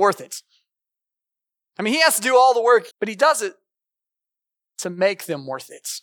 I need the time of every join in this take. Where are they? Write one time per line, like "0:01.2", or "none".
0:02.9